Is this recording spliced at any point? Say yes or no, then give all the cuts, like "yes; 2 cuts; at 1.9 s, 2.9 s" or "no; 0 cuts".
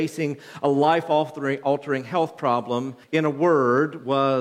yes; 1 cut; at 3.0 s